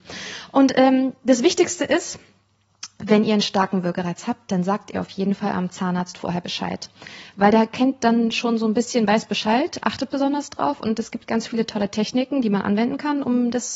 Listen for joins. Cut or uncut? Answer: uncut